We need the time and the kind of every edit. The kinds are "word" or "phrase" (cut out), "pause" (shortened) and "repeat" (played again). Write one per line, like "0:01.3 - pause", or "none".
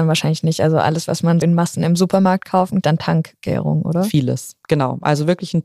0:01.4 - word
0:02.8 - phrase